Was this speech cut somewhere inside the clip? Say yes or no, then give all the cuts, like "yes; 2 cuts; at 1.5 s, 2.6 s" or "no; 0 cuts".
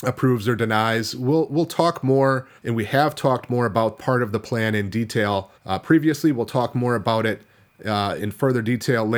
yes; 4 cuts; at 2.6 s, 4.0 s, 5.5 s, 8.2 s